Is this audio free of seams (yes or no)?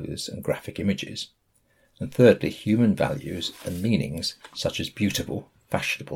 yes